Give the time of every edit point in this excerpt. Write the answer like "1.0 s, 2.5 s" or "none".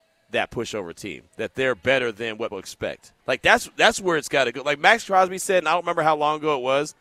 1.3 s, 2.5 s, 3.2 s